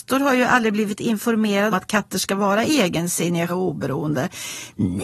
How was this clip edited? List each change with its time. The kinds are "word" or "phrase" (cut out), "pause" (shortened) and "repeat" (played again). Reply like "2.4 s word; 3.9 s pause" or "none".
1.7 s word; 3.5 s word